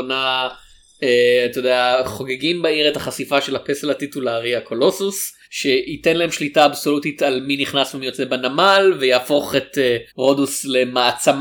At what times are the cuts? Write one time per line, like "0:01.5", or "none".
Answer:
0:05.4
0:10.1